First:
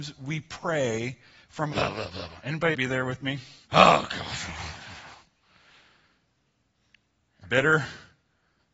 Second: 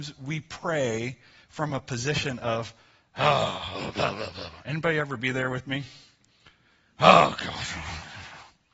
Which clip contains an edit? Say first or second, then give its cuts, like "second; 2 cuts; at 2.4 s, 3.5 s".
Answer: first; 4 cuts; at 1.7 s, 2.7 s, 3.6 s, 7.4 s